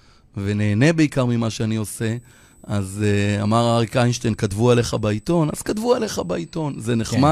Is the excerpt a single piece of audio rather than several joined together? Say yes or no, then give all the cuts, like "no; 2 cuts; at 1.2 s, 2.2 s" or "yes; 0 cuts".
yes; 0 cuts